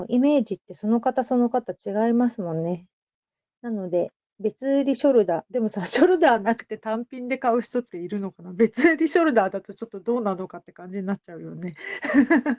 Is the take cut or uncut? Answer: uncut